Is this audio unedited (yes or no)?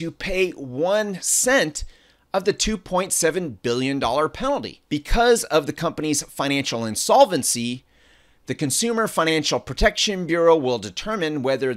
no